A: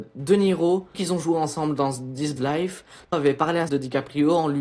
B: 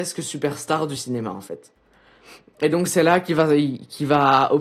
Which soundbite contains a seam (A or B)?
A